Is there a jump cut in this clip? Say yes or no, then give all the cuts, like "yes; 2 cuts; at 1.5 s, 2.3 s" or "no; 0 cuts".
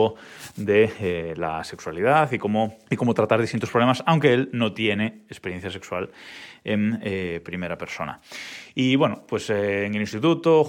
yes; 1 cut; at 2.8 s